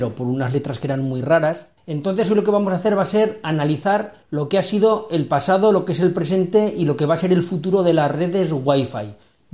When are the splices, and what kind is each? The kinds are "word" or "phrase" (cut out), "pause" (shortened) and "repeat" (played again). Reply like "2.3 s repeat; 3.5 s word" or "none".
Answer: 1.8 s pause; 4.2 s pause